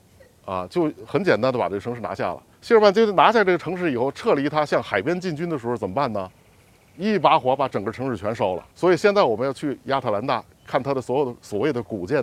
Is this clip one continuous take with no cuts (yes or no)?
no